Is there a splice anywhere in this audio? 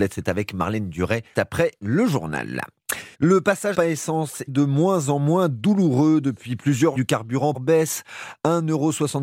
yes; 6 cuts; at 1.3 s, 3.1 s, 3.7 s, 4.5 s, 7.0 s, 7.5 s

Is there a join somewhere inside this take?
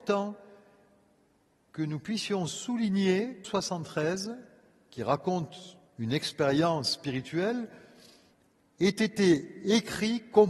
yes; 2 cuts; at 3.4 s, 5.9 s

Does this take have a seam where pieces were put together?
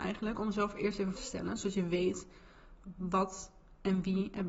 yes; 1 cut; at 1.1 s

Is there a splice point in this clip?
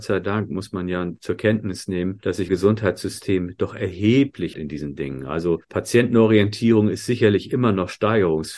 yes; 2 cuts; at 2.5 s, 4.5 s

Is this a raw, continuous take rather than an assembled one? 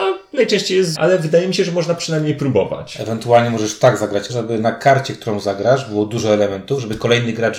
no; 2 cuts; at 0.9 s, 4.3 s

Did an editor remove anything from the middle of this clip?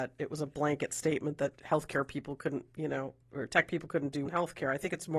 yes; 2 cuts; at 2.7 s, 4.3 s

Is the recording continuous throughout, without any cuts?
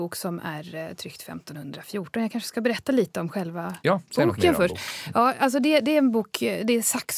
yes; 0 cuts

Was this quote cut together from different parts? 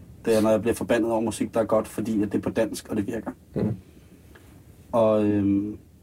no; 0 cuts

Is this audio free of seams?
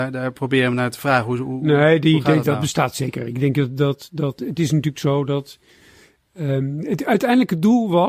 yes; 0 cuts

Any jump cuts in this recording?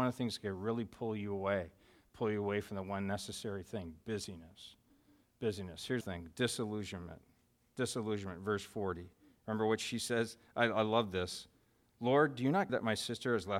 yes; 2 cuts; at 6.0 s, 12.7 s

